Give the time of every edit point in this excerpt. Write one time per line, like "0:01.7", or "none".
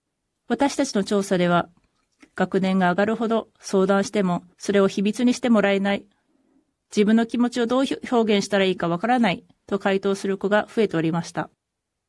0:04.5